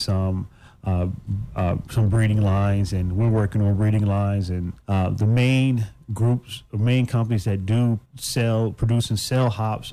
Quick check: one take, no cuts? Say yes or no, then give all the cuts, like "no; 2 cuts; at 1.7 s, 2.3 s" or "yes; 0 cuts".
no; 2 cuts; at 4.8 s, 8.1 s